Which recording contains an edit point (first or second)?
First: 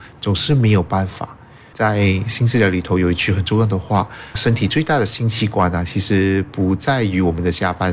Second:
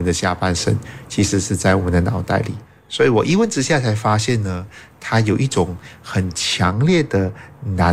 second